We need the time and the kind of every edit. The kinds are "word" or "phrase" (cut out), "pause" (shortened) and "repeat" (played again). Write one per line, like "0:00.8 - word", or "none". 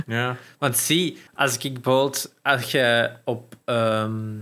0:01.3 - pause

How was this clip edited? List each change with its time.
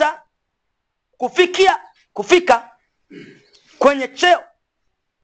none

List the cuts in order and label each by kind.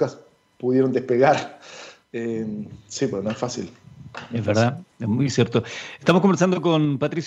0:04.9 - pause

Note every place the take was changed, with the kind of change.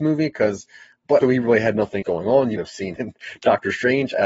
0:01.2 - word
0:02.0 - word
0:02.6 - word
0:03.0 - word

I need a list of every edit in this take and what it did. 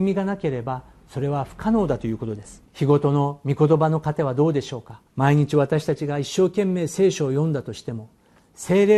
0:02.7 - pause
0:05.1 - pause

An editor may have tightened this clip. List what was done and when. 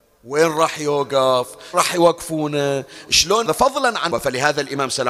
0:01.7 - word
0:03.5 - phrase
0:04.1 - word

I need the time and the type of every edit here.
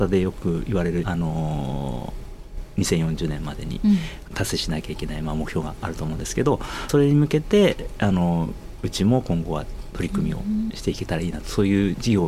0:01.0 - phrase
0:06.9 - phrase
0:10.7 - phrase

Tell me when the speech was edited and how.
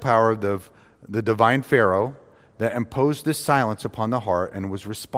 none

